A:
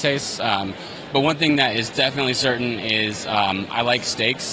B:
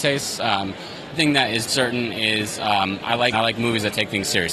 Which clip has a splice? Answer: B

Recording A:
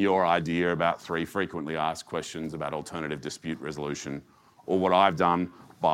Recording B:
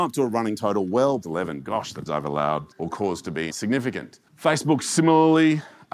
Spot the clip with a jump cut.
B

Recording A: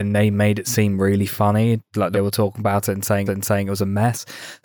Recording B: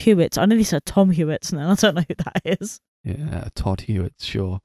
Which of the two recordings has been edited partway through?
A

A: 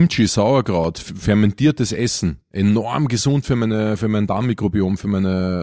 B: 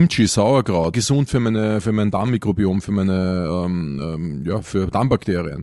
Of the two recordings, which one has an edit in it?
B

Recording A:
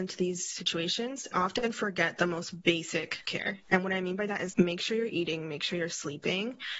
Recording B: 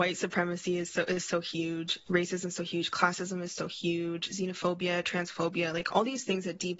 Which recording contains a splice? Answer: A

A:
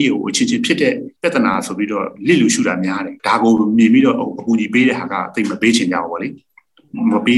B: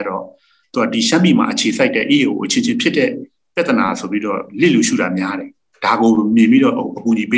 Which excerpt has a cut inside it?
A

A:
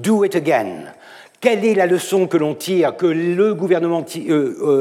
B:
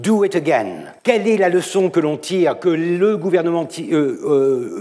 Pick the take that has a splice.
B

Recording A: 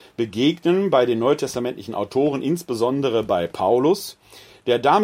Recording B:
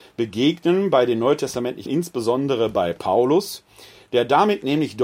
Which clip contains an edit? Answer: B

